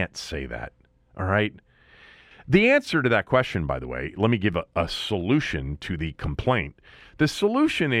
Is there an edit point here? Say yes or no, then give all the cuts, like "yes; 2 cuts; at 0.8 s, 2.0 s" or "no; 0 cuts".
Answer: no; 0 cuts